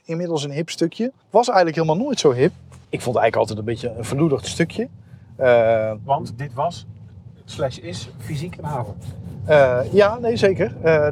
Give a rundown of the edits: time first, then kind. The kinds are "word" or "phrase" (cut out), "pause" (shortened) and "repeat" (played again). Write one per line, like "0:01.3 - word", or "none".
0:01.2 - pause
0:02.8 - pause